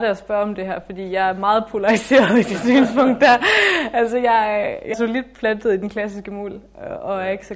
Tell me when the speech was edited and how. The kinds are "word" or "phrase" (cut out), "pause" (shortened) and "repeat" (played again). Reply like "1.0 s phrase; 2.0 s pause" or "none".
4.9 s word